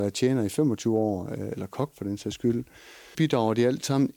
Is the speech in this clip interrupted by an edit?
yes; 1 cut; at 3.1 s

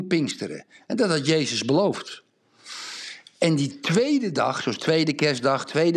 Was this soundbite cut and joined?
no; 0 cuts

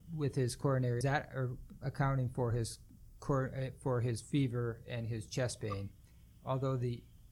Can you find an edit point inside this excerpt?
yes; 1 cut; at 1.0 s

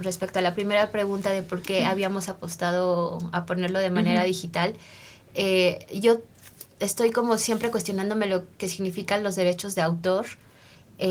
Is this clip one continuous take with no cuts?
yes; 0 cuts

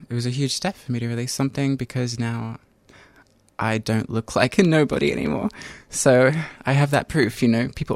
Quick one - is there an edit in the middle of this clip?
no; 0 cuts

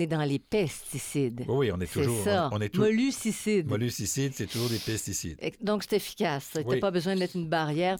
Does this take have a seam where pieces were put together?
no; 0 cuts

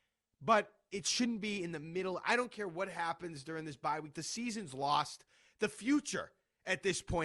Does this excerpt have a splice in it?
no; 0 cuts

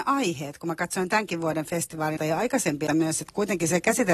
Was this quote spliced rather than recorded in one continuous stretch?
yes; 2 cuts; at 2.2 s, 2.9 s

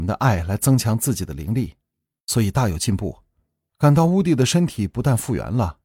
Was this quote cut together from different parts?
no; 0 cuts

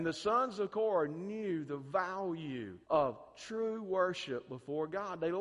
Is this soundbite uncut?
no; 1 cut; at 2.8 s

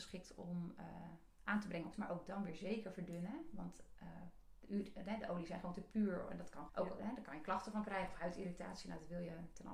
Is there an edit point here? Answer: yes; 2 cuts; at 1.9 s, 6.7 s

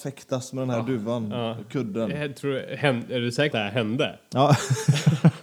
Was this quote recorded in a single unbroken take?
no; 1 cut; at 3.5 s

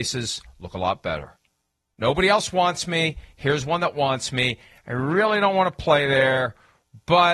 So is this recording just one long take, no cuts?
yes; 0 cuts

